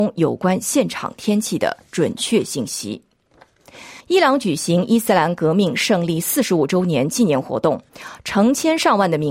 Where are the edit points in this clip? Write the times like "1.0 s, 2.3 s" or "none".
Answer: 4.0 s